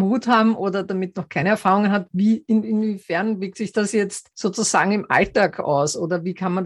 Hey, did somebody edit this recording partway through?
no; 0 cuts

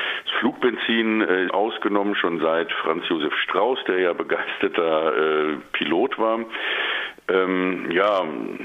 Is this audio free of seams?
no; 1 cut; at 1.5 s

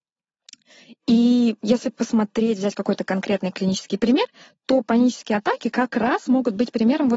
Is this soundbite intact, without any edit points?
yes; 0 cuts

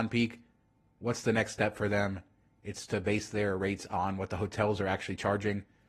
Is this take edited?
no; 0 cuts

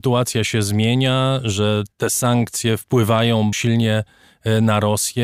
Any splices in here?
yes; 2 cuts; at 1.9 s, 3.5 s

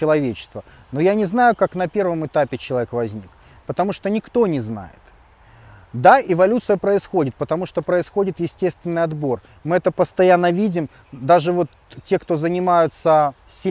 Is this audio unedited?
yes; 0 cuts

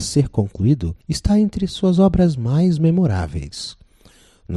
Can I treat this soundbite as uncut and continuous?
no; 1 cut; at 1.0 s

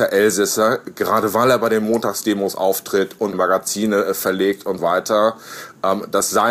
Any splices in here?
yes; 2 cuts; at 3.3 s, 4.8 s

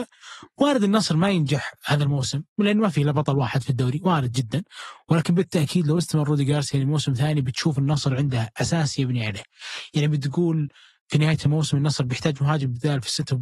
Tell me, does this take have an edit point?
no; 0 cuts

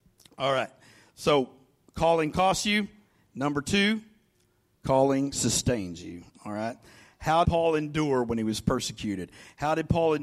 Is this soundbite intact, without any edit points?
no; 1 cut; at 7.4 s

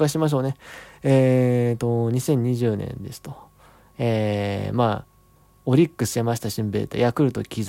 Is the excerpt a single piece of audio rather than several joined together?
yes; 0 cuts

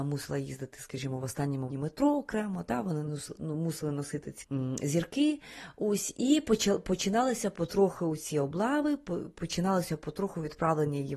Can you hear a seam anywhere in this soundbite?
yes; 3 cuts; at 1.7 s, 3.1 s, 4.4 s

